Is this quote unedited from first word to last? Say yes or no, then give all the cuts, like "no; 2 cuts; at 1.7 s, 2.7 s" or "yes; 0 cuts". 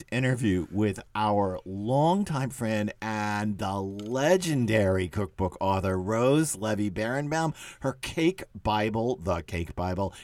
yes; 0 cuts